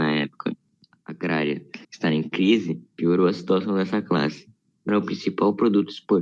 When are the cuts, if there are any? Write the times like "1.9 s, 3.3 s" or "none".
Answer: 1.8 s, 2.9 s, 4.9 s